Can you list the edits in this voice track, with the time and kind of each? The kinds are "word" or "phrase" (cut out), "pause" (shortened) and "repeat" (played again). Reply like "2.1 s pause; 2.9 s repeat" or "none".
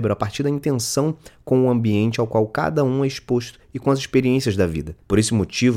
none